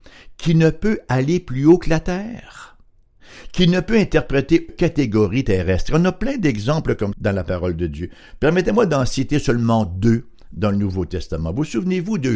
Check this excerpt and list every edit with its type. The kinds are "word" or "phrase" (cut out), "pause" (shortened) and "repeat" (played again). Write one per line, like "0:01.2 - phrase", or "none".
0:04.7 - phrase
0:07.1 - word